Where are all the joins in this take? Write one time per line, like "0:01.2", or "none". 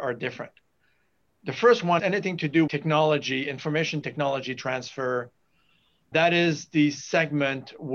0:02.0
0:02.7
0:04.0
0:06.1